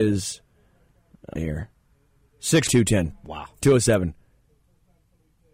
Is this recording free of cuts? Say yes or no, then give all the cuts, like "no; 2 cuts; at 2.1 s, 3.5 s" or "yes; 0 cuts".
no; 2 cuts; at 1.4 s, 2.7 s